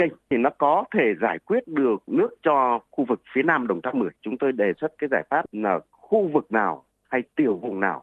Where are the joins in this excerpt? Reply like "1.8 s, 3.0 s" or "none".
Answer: 4.2 s

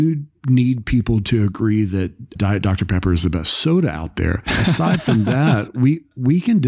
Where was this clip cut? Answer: 2.4 s

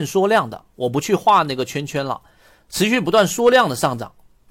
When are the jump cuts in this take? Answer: none

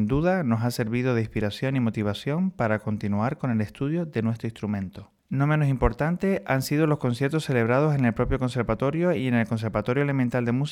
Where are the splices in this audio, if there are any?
5.2 s

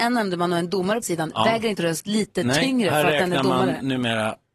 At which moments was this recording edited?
1.0 s, 1.8 s

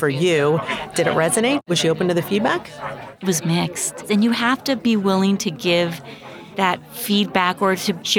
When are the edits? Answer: none

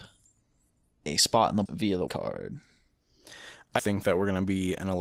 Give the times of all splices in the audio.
1.7 s, 2.1 s, 3.8 s

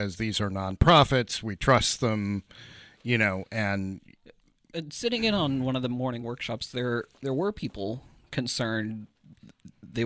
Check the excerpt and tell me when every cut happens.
none

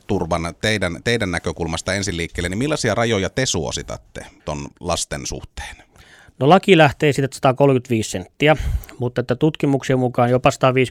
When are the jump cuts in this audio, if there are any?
4.4 s

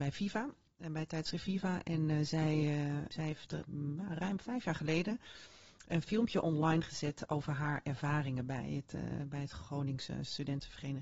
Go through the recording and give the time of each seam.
3.1 s

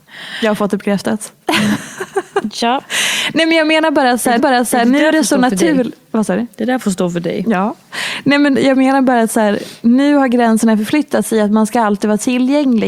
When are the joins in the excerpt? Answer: 4.4 s

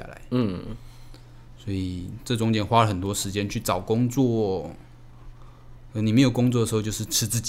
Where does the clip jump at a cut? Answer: none

